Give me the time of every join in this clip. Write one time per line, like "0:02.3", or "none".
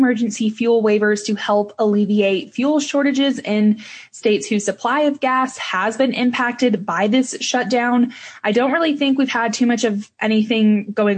none